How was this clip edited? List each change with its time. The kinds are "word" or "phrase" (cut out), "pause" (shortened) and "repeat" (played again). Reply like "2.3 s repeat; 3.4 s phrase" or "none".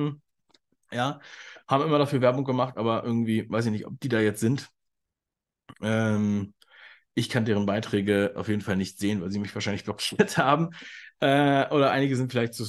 none